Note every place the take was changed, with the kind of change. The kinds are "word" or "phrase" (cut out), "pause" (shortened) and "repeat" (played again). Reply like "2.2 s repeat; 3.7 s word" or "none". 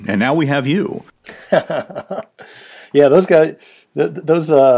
none